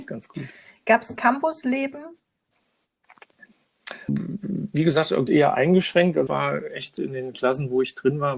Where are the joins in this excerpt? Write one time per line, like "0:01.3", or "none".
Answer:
0:01.1
0:04.1
0:05.3
0:06.3